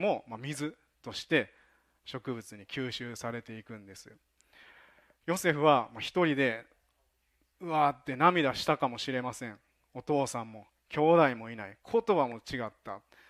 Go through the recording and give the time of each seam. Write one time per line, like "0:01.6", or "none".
none